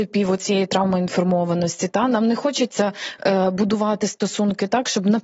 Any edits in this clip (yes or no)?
no